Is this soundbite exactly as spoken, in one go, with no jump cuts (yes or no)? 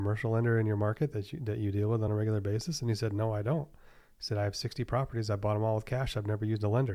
yes